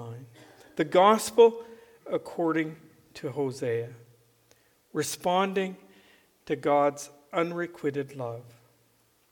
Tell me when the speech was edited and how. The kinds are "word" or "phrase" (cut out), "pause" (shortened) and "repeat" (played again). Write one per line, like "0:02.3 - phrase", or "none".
none